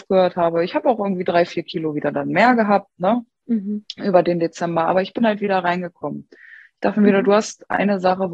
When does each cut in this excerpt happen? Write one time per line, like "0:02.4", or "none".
none